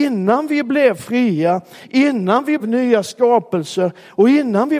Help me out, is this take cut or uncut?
cut